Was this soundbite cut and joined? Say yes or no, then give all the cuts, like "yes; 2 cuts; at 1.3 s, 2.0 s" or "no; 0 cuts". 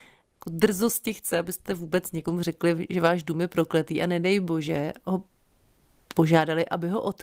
no; 0 cuts